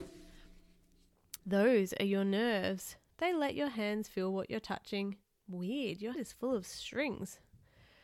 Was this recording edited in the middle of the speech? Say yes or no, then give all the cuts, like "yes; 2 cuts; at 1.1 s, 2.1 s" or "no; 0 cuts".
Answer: yes; 3 cuts; at 1.4 s, 5.2 s, 6.1 s